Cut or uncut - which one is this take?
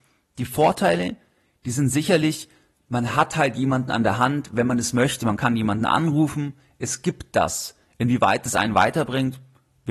uncut